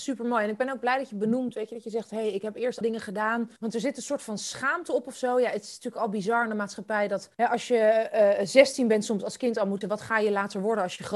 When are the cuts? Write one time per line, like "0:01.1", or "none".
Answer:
0:02.8
0:03.6
0:07.3
0:09.8